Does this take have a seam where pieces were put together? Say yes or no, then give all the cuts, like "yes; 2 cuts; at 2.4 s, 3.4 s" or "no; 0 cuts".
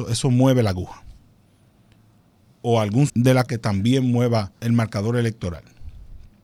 yes; 3 cuts; at 3.1 s, 3.5 s, 4.6 s